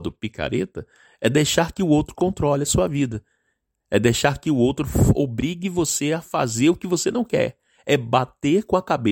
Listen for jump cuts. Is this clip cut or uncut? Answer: uncut